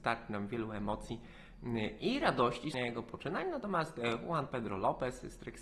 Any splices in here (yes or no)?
yes